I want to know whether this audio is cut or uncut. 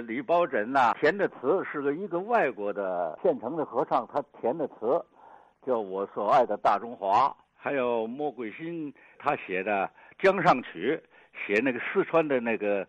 cut